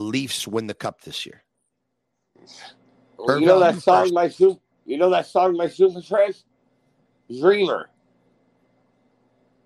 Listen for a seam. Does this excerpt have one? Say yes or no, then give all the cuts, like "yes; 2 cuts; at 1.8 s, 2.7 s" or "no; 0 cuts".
yes; 1 cut; at 2.9 s